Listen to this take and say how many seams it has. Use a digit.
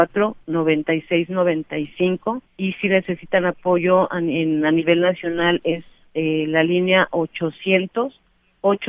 1